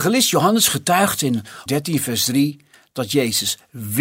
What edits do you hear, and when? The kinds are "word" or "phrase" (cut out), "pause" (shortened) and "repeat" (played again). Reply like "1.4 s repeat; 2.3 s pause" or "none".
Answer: 1.7 s word